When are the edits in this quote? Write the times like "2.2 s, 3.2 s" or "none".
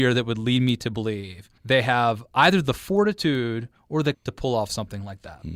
1.6 s, 4.1 s